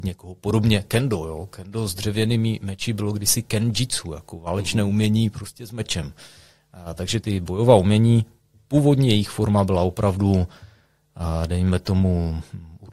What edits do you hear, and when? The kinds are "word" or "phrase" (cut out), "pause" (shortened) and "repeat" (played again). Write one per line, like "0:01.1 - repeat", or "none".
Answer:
0:07.2 - word